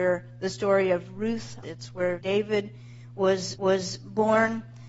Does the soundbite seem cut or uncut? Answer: cut